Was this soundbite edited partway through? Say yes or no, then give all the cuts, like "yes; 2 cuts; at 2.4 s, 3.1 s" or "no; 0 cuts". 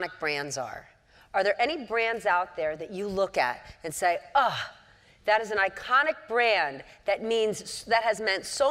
no; 0 cuts